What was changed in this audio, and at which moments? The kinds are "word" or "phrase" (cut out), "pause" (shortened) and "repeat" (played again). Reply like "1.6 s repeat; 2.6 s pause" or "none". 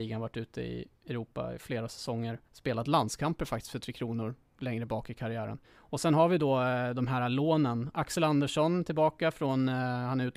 2.5 s pause; 5.6 s pause

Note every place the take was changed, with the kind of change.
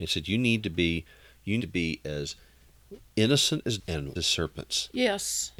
1.6 s word; 3.8 s word; 4.2 s word

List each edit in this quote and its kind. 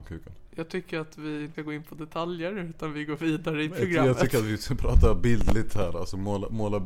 1.5 s word

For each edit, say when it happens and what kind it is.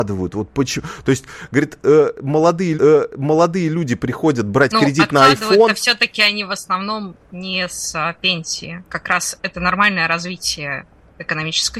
2.7 s repeat; 8.9 s word

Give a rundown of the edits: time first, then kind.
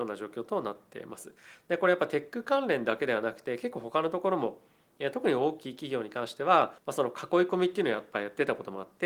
6.8 s pause

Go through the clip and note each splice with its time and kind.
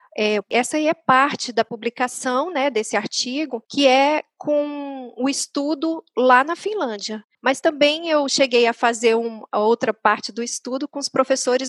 3.7 s pause; 7.3 s pause

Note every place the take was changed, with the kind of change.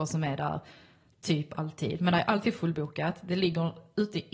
none

